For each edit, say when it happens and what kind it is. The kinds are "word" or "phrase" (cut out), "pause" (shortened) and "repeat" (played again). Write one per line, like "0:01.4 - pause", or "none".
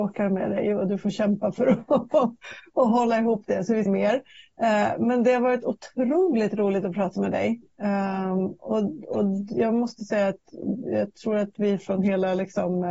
0:03.9 - phrase